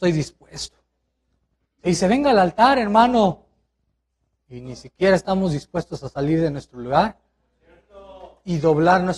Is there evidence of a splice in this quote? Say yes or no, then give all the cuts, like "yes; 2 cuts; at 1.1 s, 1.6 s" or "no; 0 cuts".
yes; 1 cut; at 4.1 s